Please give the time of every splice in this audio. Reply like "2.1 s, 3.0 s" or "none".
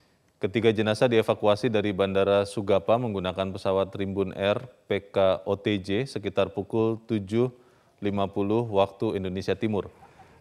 none